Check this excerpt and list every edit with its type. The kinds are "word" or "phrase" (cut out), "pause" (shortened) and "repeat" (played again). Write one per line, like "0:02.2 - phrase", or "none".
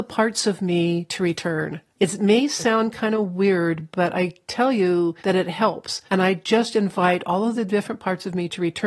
0:01.9 - pause
0:05.2 - pause
0:06.1 - pause